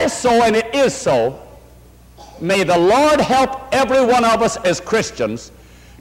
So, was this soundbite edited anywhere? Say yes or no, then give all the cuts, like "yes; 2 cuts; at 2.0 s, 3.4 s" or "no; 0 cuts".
no; 0 cuts